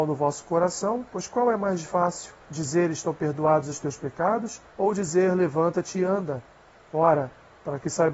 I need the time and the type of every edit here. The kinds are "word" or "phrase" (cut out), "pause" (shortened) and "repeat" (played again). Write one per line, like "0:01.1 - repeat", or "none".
0:01.1 - pause
0:02.4 - pause
0:04.7 - pause